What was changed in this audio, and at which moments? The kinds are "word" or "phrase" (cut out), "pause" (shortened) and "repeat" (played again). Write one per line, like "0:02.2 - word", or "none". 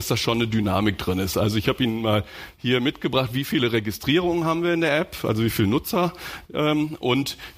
none